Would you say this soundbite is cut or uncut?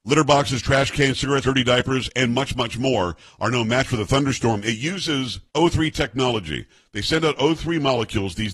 cut